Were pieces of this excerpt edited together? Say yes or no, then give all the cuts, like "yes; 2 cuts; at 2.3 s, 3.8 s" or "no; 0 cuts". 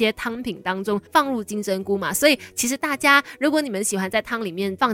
yes; 1 cut; at 1.1 s